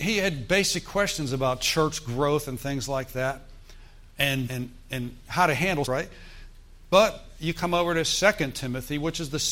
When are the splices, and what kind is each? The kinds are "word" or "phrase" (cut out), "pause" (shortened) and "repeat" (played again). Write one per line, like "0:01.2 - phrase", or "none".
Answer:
0:04.5 - word
0:05.9 - phrase